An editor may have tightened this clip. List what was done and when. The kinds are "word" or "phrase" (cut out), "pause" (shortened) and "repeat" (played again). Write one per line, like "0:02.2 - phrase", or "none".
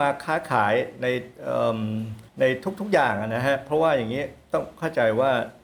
0:02.3 - pause

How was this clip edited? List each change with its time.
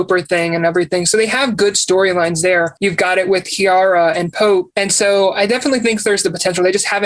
none

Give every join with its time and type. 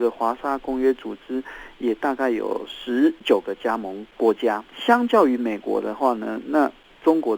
0:04.7 - pause

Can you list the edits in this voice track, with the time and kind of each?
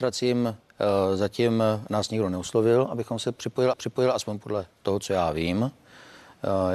0:03.7 - repeat
0:04.7 - pause

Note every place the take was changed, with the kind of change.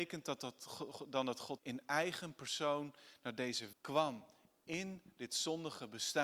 0:01.6 - word
0:03.7 - word

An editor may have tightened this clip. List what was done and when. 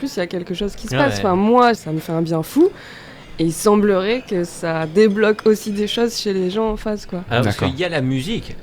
0:01.7 - word

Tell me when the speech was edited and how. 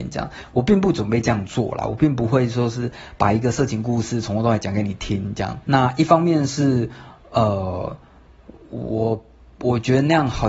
0:05.6 - pause

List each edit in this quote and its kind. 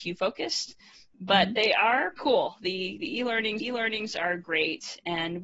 0:02.2 - word
0:03.6 - repeat

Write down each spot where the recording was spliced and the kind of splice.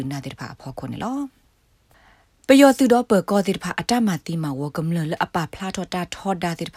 none

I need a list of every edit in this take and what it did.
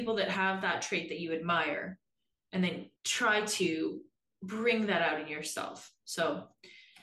0:03.0 - pause

